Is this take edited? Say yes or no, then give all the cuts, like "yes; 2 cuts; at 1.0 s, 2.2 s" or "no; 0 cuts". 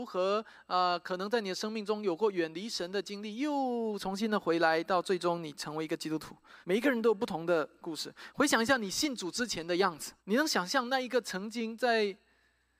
yes; 2 cuts; at 6.6 s, 10.2 s